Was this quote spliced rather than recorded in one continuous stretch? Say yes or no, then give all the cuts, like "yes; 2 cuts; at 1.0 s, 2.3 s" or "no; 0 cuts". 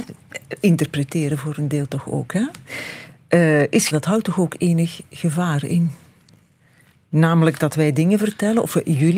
yes; 1 cut; at 3.9 s